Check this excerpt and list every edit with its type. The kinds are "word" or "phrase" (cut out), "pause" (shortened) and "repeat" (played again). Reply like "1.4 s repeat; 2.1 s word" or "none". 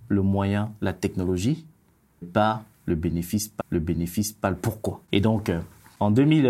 2.2 s word; 3.6 s repeat; 5.0 s pause